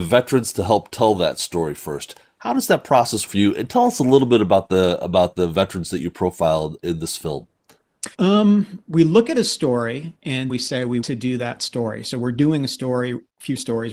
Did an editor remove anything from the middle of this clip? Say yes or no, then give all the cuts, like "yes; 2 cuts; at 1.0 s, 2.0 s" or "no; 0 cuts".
yes; 4 cuts; at 3.3 s, 8.1 s, 10.5 s, 11.0 s